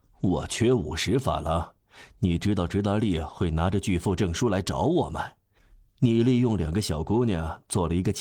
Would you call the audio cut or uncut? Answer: uncut